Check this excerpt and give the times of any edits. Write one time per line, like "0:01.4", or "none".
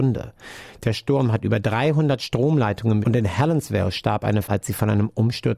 0:03.0
0:04.4